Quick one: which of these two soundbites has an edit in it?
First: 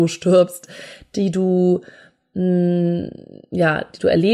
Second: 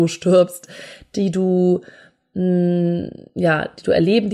second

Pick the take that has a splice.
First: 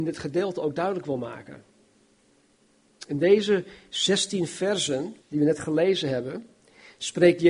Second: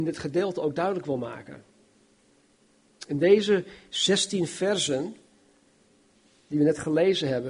first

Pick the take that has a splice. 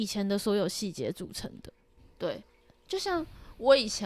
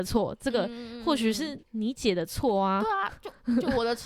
second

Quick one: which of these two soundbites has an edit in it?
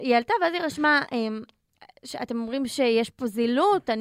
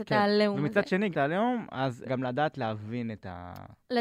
second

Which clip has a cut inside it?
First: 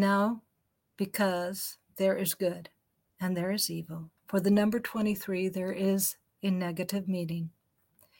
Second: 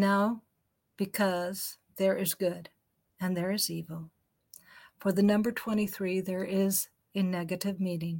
first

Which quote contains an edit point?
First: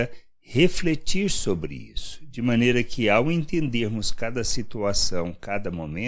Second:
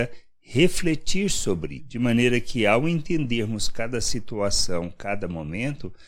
second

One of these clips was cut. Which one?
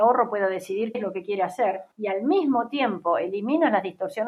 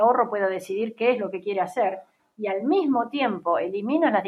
first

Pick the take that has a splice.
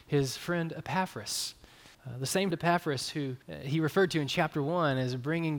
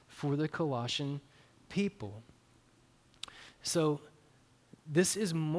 first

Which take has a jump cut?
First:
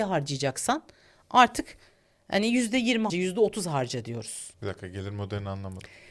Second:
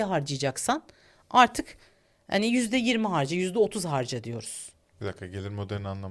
first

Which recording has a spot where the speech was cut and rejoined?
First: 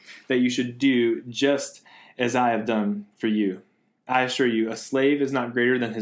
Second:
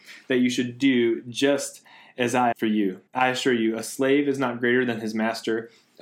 second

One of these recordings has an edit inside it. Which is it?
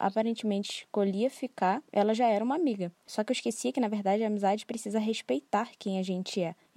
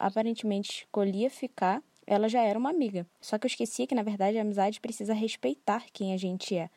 first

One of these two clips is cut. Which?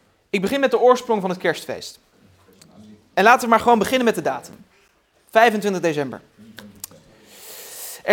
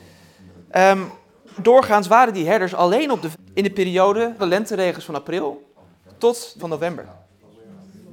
second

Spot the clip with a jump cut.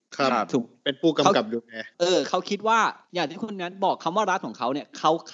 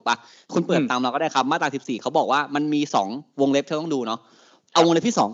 first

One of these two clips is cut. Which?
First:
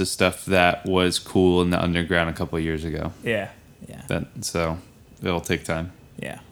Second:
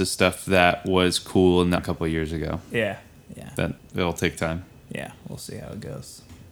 second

